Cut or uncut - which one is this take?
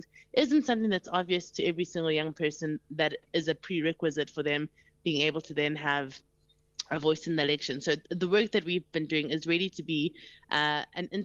uncut